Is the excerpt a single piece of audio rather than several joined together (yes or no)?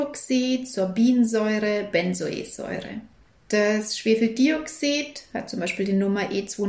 yes